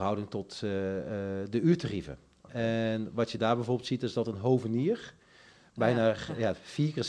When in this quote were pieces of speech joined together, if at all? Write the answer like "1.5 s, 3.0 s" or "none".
none